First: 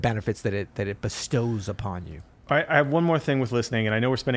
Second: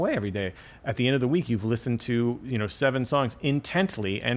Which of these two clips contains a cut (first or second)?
first